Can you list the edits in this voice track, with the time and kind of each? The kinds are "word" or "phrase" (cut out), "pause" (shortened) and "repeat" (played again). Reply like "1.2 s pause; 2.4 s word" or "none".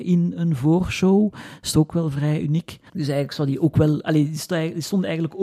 2.9 s pause